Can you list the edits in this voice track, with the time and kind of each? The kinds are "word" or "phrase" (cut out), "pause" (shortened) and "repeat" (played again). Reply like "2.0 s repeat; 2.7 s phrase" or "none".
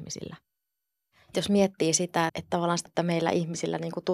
1.3 s word; 2.3 s word; 2.9 s word